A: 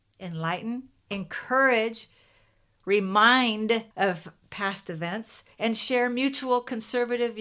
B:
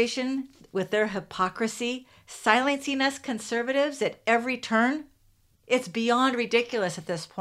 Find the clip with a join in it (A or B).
A